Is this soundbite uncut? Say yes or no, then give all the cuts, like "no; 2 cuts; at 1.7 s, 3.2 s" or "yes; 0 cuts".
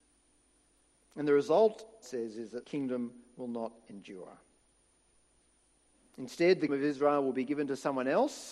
no; 3 cuts; at 2.0 s, 2.6 s, 6.7 s